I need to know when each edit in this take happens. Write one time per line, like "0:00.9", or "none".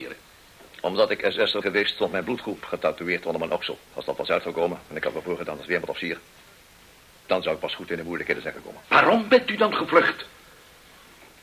0:01.6
0:03.8
0:08.8